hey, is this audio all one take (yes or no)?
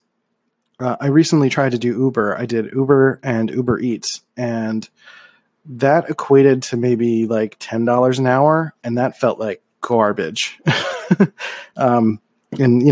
yes